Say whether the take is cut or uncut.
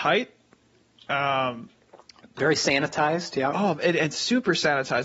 uncut